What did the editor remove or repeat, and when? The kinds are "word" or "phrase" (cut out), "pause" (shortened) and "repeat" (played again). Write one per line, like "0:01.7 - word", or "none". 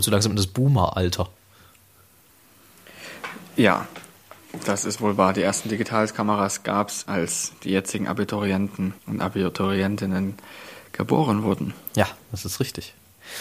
0:07.1 - word
0:09.0 - pause

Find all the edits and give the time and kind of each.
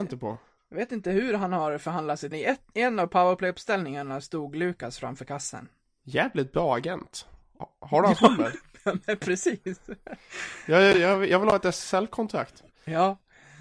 0:02.3 - phrase

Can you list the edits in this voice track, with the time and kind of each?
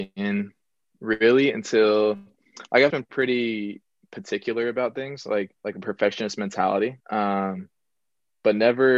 0:02.9 - word
0:05.6 - pause
0:07.0 - pause

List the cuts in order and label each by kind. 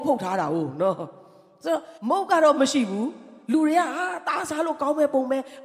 0:02.0 - pause

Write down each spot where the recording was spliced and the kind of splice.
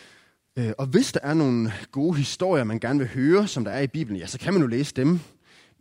none

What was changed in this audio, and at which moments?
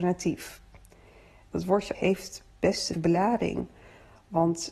0:01.9 - word
0:02.9 - word

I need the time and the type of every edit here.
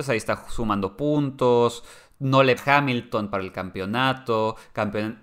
0:02.6 - word

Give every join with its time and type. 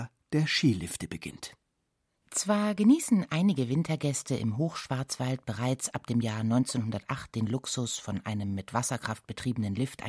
none

